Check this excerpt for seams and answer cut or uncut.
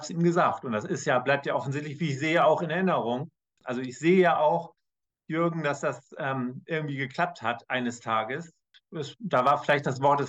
uncut